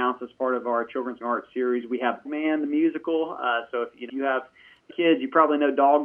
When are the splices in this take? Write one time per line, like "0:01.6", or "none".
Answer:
0:01.2
0:02.3
0:04.1
0:04.9